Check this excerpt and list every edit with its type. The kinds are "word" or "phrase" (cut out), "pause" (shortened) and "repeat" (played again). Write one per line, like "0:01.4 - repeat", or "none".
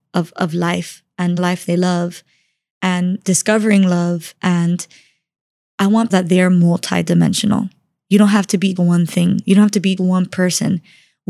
0:01.4 - word
0:06.1 - phrase
0:08.8 - word
0:10.0 - word